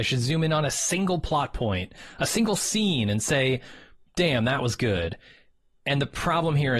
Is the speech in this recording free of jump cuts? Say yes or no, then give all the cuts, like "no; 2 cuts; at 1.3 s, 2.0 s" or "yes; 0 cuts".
yes; 0 cuts